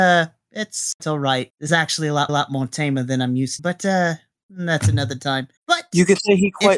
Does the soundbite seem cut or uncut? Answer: cut